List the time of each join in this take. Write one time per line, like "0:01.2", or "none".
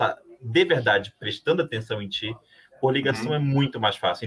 none